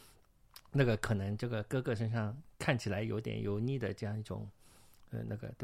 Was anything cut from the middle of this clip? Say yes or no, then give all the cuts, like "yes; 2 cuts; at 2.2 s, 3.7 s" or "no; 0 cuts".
no; 0 cuts